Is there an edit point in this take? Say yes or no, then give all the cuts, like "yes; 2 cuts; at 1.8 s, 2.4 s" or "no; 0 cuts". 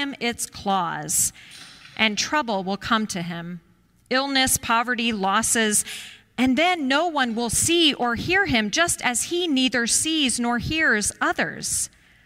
no; 0 cuts